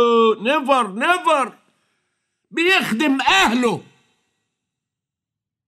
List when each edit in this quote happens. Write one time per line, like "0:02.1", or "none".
none

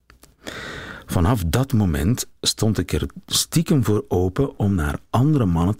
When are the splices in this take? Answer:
0:02.4

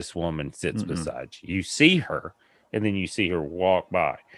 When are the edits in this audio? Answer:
none

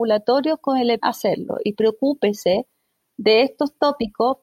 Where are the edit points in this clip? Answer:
0:01.0

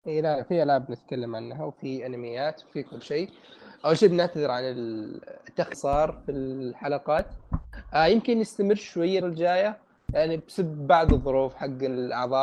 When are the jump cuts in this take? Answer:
0:05.7
0:09.2

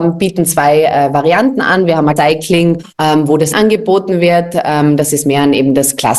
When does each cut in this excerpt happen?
0:02.2
0:02.9
0:03.5

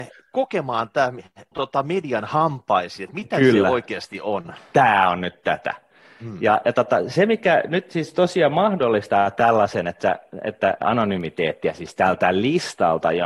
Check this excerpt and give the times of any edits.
0:01.5
0:10.8

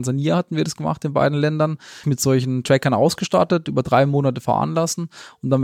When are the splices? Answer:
0:02.0

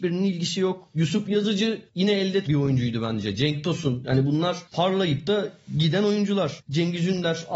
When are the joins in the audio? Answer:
0:02.4

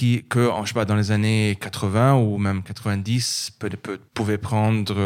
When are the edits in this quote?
0:04.1

